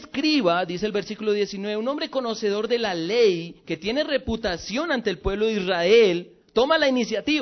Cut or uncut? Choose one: cut